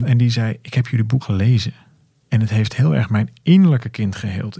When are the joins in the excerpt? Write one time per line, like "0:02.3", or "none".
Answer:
0:01.2